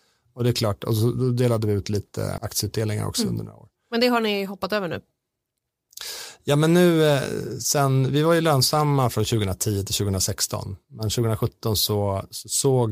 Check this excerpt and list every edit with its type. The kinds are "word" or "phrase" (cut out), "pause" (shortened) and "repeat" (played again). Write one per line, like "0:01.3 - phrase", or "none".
0:02.4 - word

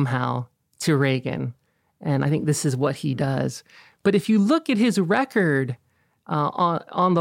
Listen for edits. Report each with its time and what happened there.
none

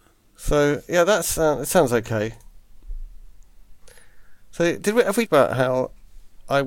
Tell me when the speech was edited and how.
0:05.3 - word

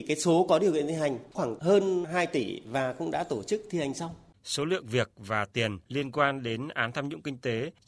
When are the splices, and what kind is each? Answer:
0:04.3 - pause
0:05.8 - pause

